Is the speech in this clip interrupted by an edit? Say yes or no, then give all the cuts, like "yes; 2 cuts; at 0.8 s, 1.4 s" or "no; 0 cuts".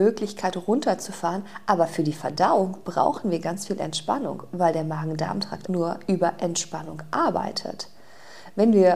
yes; 1 cut; at 5.7 s